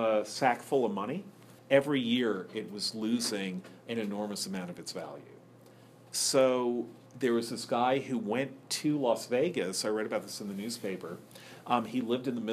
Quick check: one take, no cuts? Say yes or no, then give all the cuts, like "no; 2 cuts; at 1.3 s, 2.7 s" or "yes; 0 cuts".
no; 2 cuts; at 1.6 s, 7.1 s